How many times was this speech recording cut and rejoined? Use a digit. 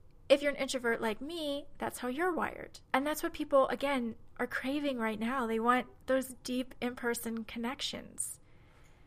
1